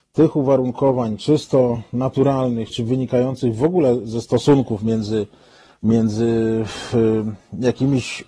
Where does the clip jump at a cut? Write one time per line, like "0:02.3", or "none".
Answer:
0:02.7